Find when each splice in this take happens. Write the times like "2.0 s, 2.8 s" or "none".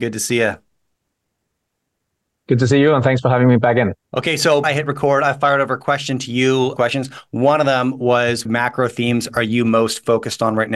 4.0 s, 4.6 s, 6.8 s, 8.4 s